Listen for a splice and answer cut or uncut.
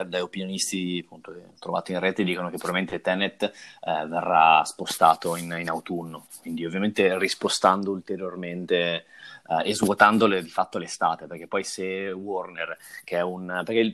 cut